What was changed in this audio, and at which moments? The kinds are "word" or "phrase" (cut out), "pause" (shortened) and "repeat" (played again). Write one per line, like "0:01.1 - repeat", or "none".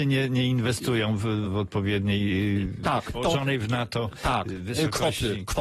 0:01.4 - word
0:03.1 - word